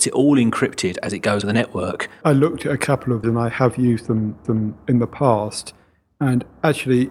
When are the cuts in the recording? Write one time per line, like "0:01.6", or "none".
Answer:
0:01.4
0:03.2
0:04.4